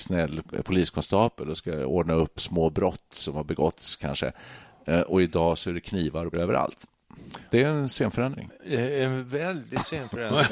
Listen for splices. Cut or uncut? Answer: cut